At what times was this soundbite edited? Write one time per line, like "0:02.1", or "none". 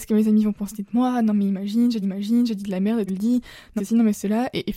0:02.0
0:03.1
0:03.8